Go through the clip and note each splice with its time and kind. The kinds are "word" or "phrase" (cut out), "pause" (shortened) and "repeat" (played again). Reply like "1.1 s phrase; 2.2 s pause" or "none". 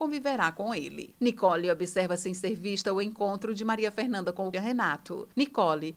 4.5 s word